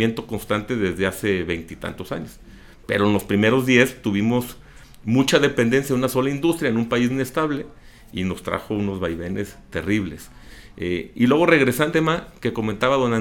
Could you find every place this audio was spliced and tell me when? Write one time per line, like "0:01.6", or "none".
0:07.1
0:11.9